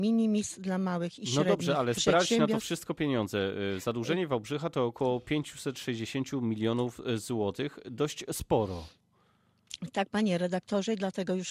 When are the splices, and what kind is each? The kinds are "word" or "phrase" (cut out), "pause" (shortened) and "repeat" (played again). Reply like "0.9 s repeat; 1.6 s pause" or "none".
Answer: 2.0 s word